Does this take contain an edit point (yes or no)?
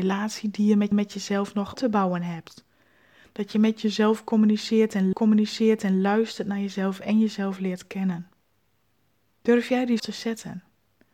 yes